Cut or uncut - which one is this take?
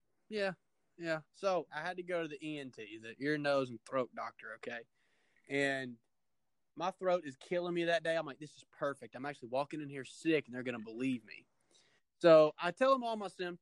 cut